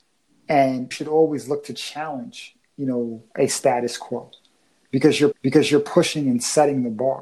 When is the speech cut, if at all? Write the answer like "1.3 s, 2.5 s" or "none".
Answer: 0.9 s, 3.3 s, 5.3 s

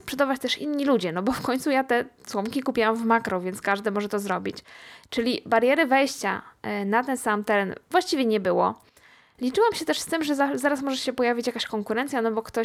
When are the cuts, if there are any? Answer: none

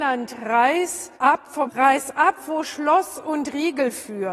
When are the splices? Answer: 1.1 s, 1.7 s

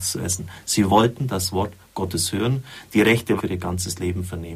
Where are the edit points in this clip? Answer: 3.4 s

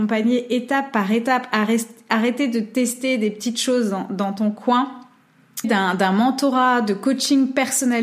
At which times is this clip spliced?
5.6 s

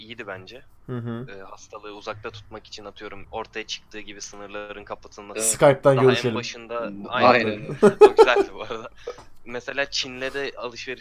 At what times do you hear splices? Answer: 3.2 s, 5.3 s

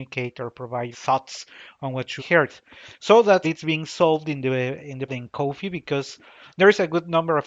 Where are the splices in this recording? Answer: 0.9 s, 2.2 s, 3.4 s, 4.8 s, 5.1 s

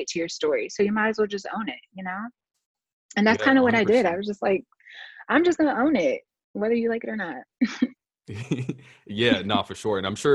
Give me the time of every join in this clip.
none

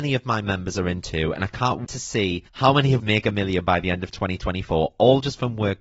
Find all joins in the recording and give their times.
1.8 s, 2.5 s, 3.0 s

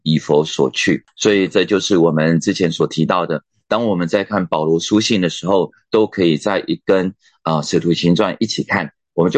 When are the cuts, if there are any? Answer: none

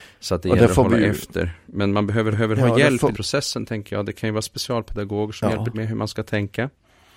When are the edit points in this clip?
2.3 s, 3.1 s, 5.7 s

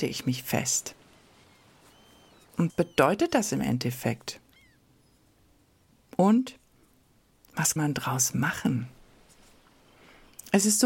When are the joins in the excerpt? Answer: 2.7 s, 7.8 s

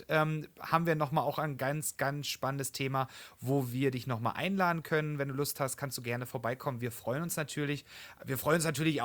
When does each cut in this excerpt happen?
none

